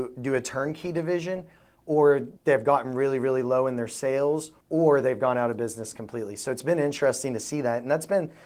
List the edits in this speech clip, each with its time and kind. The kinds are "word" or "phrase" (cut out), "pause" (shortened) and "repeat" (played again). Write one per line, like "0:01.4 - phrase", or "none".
0:02.4 - pause
0:04.6 - pause